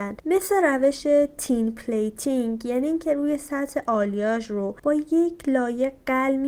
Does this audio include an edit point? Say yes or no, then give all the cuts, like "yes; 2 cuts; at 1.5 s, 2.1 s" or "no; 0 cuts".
no; 0 cuts